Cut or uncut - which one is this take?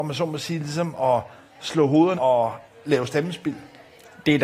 cut